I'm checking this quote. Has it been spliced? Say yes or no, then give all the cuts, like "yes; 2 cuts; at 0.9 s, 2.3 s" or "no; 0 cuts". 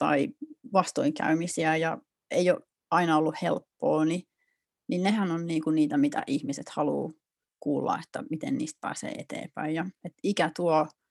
no; 0 cuts